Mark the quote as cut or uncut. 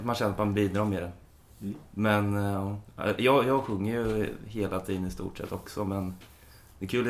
uncut